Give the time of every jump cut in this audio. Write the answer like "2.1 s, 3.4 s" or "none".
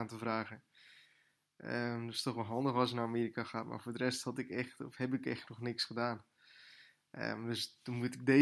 none